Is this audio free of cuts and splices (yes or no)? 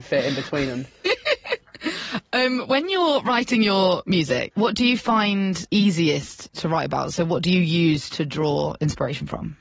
yes